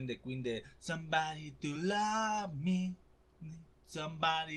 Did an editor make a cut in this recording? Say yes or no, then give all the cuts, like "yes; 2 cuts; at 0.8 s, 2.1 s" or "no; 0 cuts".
no; 0 cuts